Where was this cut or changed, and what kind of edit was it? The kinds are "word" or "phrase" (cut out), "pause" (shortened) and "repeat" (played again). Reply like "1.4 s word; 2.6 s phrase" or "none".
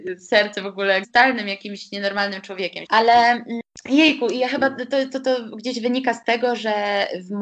1.0 s phrase; 2.8 s word